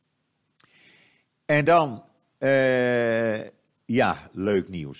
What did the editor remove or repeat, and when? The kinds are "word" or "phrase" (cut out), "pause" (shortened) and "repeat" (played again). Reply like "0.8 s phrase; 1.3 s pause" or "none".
none